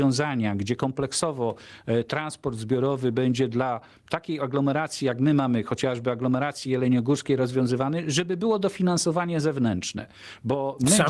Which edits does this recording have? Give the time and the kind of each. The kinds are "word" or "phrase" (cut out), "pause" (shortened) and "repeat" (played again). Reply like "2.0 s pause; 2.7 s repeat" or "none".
none